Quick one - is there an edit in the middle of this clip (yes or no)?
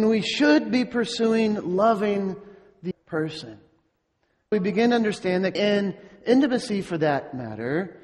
yes